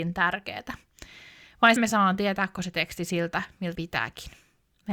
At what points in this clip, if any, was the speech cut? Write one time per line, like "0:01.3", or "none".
0:01.8
0:02.5
0:03.7